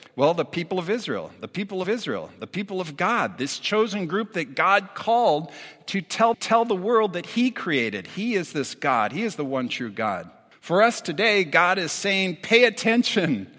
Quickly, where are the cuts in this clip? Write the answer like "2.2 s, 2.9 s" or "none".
1.8 s, 6.3 s, 10.5 s